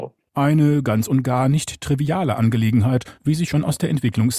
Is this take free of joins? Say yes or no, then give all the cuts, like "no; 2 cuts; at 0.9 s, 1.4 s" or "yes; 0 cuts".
no; 1 cut; at 3.1 s